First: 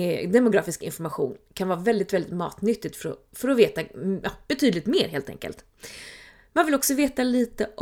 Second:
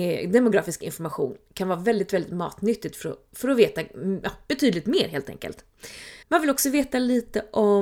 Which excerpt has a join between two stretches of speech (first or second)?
second